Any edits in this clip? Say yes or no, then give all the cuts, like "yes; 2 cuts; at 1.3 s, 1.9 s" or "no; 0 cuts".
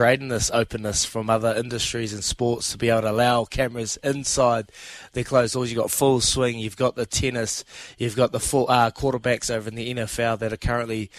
no; 0 cuts